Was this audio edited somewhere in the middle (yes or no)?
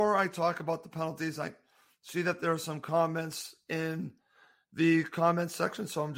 no